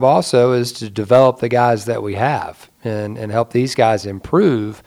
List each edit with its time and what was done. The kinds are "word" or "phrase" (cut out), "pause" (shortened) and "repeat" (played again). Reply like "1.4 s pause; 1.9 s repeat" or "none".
none

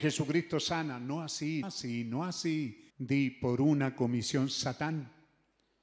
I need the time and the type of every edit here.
1.6 s word; 2.9 s pause

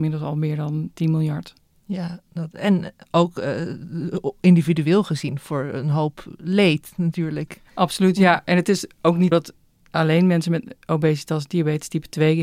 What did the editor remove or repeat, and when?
9.3 s word

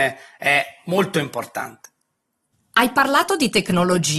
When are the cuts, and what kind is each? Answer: none

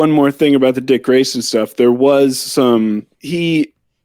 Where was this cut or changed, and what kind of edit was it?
3.1 s pause

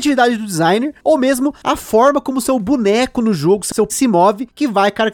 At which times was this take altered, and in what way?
3.9 s word

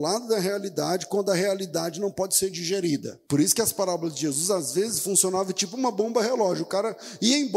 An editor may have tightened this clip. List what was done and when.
3.3 s pause

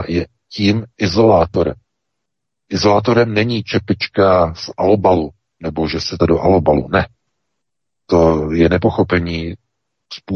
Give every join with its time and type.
6.2 s phrase

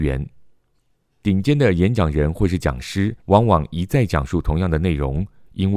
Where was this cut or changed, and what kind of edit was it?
3.2 s pause

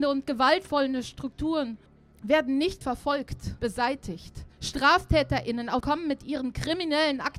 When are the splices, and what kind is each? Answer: 1.9 s pause; 2.8 s word; 3.6 s word; 4.5 s pause; 5.8 s phrase

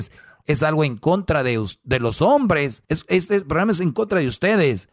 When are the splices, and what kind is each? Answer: 2.8 s pause

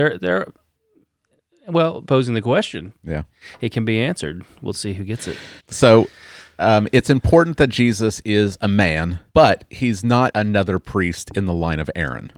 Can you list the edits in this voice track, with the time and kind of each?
2.1 s word; 5.6 s pause; 9.3 s pause; 10.3 s word

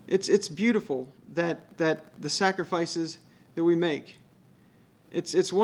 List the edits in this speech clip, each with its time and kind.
1.2 s pause

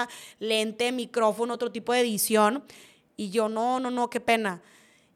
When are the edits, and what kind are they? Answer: none

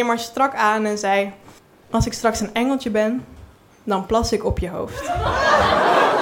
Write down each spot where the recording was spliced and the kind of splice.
1.6 s pause

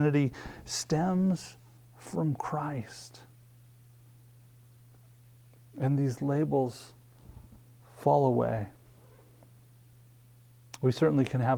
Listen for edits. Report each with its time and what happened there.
none

